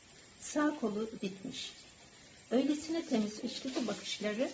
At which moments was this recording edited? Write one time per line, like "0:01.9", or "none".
0:01.2
0:03.4